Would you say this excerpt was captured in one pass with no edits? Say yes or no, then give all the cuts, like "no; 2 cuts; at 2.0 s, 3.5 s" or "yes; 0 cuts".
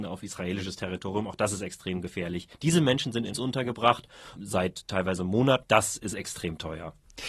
no; 4 cuts; at 2.5 s, 3.3 s, 4.4 s, 5.6 s